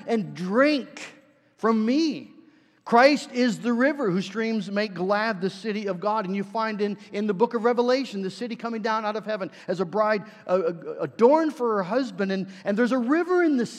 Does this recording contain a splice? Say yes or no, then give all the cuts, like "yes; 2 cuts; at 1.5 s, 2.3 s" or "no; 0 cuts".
no; 0 cuts